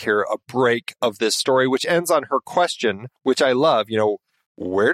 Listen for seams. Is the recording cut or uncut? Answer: cut